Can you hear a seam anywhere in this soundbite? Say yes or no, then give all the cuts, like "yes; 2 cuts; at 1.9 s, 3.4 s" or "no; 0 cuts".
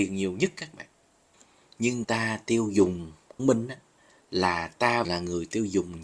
yes; 3 cuts; at 2.0 s, 3.4 s, 5.0 s